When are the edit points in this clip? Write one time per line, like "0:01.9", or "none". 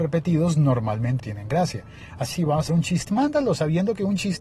0:01.2
0:02.3
0:02.7
0:03.1